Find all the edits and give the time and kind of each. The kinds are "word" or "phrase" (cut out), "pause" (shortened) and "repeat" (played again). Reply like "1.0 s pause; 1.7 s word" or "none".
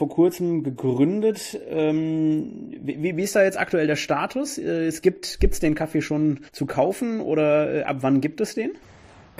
6.5 s pause